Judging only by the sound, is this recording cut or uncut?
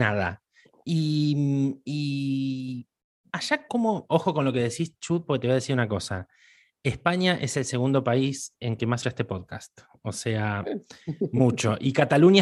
cut